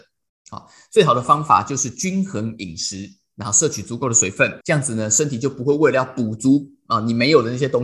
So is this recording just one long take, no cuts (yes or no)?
no